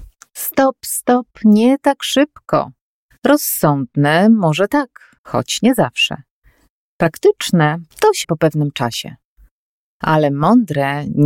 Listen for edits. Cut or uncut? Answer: cut